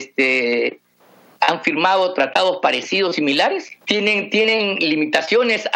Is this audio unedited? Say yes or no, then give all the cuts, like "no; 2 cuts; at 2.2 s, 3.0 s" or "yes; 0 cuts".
no; 1 cut; at 3.8 s